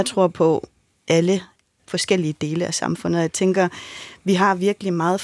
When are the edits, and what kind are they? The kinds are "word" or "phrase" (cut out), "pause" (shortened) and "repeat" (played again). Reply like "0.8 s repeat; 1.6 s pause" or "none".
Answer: 1.8 s phrase